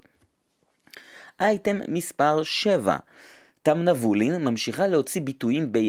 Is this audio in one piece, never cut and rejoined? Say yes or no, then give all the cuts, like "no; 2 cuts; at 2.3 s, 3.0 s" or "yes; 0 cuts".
yes; 0 cuts